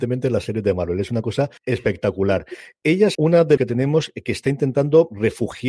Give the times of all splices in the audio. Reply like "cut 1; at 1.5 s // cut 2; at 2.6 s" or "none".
cut 1; at 1.6 s // cut 2; at 3.1 s // cut 3; at 3.6 s